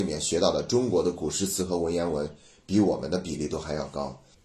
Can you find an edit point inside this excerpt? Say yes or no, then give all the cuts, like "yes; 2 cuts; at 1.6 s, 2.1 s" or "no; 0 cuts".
no; 0 cuts